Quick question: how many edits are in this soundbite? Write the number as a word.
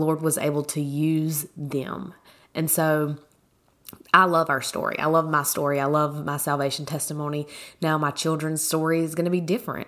zero